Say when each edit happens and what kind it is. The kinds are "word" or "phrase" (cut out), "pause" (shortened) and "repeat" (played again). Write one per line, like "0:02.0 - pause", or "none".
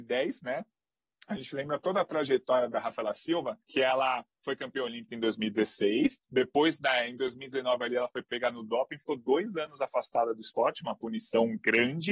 0:03.6 - pause
0:06.2 - pause

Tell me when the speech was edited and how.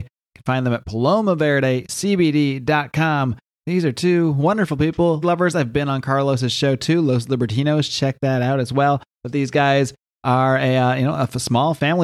0:05.2 - word

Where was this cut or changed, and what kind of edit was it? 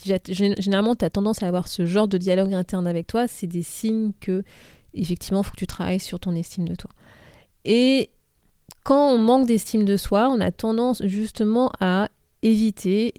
none

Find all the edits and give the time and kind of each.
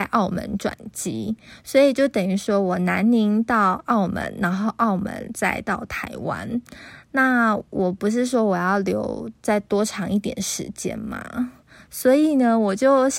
none

